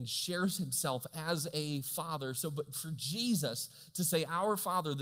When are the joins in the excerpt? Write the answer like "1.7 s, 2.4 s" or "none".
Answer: none